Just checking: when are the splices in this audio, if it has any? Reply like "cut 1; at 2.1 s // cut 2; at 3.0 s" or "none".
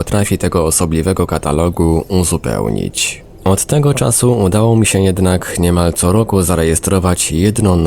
none